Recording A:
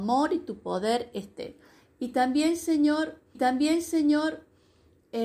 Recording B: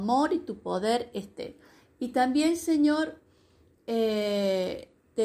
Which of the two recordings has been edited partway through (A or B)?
A